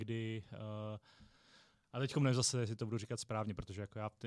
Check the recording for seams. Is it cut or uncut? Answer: uncut